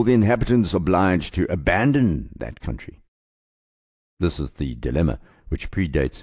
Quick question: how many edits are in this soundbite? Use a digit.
0